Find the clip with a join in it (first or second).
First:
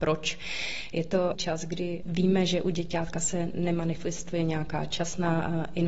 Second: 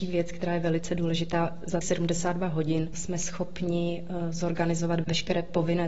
second